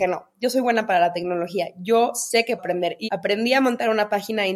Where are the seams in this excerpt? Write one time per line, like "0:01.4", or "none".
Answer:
0:02.6
0:03.0